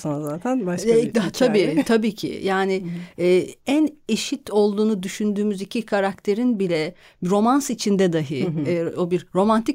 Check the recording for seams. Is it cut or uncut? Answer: uncut